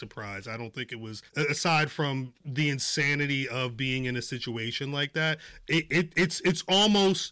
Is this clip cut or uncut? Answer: cut